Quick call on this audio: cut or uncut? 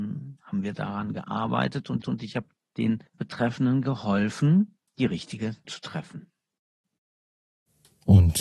cut